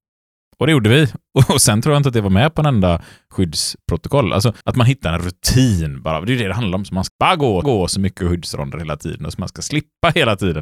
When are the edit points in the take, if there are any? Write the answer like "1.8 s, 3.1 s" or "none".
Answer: 4.6 s, 7.1 s, 7.6 s